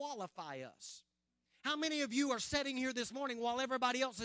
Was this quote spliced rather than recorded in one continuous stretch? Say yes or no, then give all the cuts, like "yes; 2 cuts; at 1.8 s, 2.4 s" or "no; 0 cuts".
no; 0 cuts